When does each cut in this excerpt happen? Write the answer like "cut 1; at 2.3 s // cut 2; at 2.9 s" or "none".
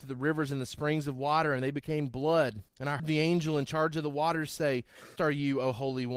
cut 1; at 2.7 s // cut 2; at 3.0 s // cut 3; at 5.2 s